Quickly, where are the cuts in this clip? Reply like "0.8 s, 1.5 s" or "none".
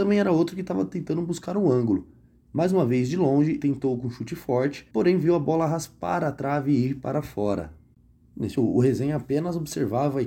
3.6 s, 4.9 s, 8.6 s